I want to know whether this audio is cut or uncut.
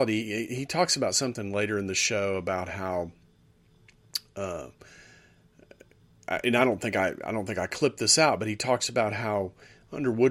uncut